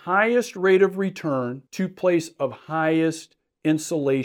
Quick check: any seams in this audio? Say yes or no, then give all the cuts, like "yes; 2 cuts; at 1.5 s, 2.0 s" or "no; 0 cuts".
yes; 1 cut; at 1.7 s